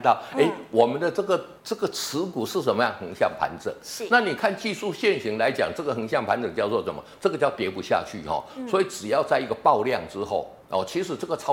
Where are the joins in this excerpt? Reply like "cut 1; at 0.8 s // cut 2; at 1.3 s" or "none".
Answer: cut 1; at 1.6 s // cut 2; at 10.6 s